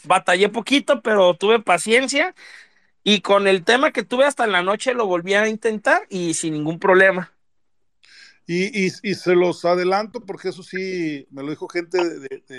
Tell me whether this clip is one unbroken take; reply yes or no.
yes